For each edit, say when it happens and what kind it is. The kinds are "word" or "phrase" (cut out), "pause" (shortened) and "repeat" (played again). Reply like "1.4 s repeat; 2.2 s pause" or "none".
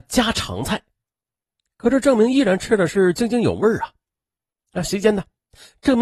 none